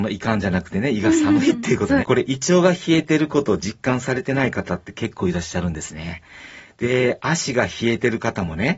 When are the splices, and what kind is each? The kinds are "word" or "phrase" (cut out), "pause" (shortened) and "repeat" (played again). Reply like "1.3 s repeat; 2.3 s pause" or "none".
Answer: 2.0 s word